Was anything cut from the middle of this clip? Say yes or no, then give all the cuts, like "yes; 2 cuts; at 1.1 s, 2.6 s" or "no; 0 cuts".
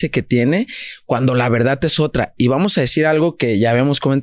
no; 0 cuts